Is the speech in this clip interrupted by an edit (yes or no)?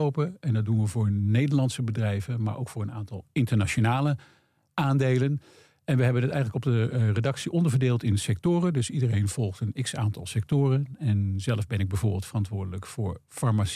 no